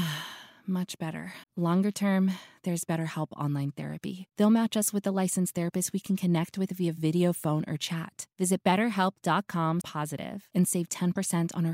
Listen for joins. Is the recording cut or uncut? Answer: cut